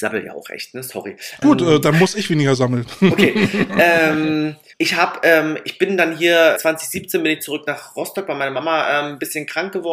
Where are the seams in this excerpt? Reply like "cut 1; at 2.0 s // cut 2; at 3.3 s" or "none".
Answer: cut 1; at 1.4 s // cut 2; at 4.7 s // cut 3; at 6.6 s